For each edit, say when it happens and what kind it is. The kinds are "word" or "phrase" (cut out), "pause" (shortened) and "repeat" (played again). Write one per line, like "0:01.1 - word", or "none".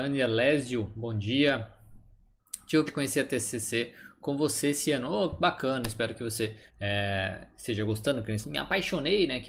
0:02.9 - word
0:06.7 - pause
0:08.4 - word